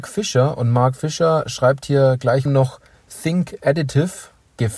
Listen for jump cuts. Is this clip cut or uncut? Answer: cut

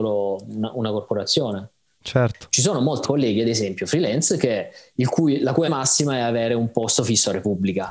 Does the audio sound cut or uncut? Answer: cut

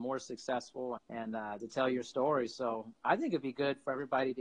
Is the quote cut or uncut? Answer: cut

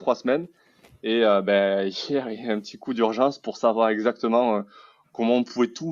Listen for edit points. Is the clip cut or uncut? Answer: uncut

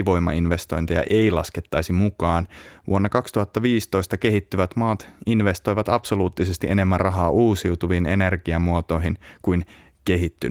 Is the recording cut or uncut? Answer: uncut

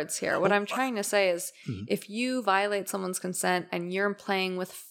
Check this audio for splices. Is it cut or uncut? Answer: uncut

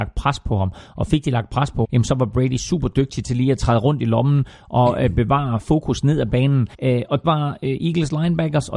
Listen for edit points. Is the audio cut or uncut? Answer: cut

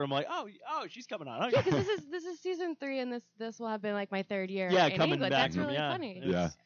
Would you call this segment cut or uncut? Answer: uncut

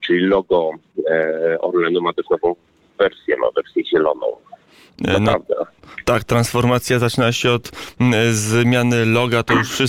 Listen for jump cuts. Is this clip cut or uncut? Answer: uncut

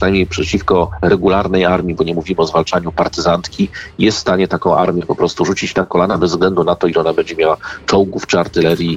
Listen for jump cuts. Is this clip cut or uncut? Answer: uncut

